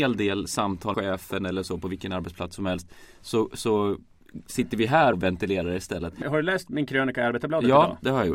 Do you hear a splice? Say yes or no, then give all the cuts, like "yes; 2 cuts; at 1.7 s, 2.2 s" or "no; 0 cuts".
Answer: yes; 3 cuts; at 0.9 s, 5.1 s, 6.2 s